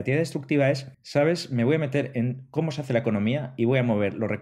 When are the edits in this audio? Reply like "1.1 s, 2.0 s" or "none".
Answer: 0.9 s